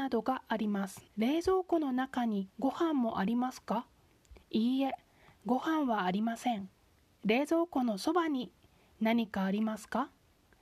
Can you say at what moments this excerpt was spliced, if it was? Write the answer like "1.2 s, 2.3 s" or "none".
1.1 s, 2.5 s, 4.4 s, 7.0 s